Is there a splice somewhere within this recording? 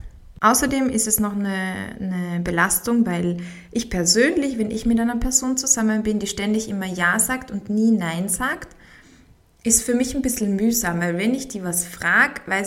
no; 0 cuts

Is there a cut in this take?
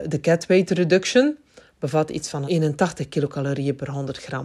yes; 1 cut; at 2.5 s

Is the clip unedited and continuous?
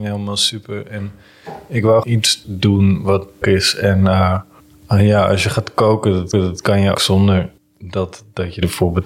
no; 7 cuts; at 2.0 s, 2.4 s, 3.4 s, 4.6 s, 6.3 s, 6.9 s, 7.6 s

